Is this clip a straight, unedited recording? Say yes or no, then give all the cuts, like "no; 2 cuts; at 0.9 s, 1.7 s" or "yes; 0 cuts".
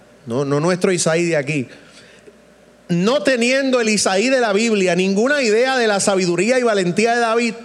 yes; 0 cuts